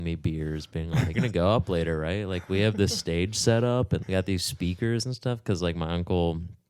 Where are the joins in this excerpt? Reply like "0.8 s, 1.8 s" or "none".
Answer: 1.1 s, 4.0 s